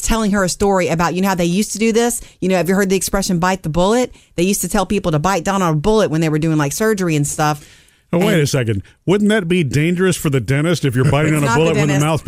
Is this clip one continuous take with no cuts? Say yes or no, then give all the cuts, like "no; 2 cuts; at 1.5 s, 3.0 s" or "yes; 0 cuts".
yes; 0 cuts